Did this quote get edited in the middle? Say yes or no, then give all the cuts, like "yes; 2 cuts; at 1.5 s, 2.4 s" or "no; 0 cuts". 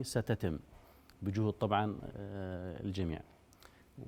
no; 0 cuts